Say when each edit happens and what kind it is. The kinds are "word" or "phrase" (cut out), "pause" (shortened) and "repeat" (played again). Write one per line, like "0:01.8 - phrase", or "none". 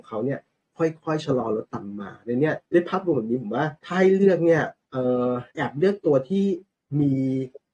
0:02.6 - pause
0:03.8 - pause
0:04.8 - pause
0:05.5 - pause

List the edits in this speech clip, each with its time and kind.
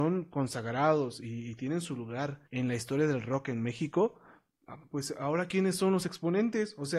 0:02.5 - pause

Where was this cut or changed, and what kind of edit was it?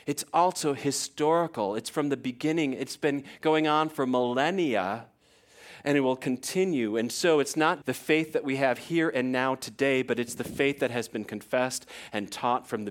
0:07.8 - word

